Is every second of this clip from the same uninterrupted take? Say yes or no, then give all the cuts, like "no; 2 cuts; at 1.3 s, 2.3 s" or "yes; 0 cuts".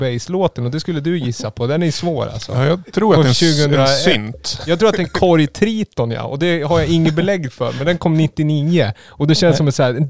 yes; 0 cuts